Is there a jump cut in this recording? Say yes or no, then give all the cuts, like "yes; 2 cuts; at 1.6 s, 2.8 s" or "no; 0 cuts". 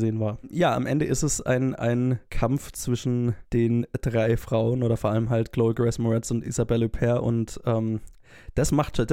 no; 0 cuts